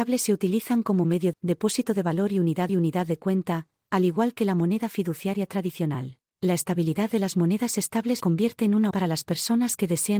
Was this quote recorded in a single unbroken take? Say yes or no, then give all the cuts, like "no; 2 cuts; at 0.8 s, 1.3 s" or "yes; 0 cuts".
no; 5 cuts; at 1.3 s, 2.7 s, 6.3 s, 8.2 s, 8.9 s